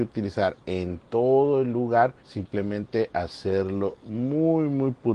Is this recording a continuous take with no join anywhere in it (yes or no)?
no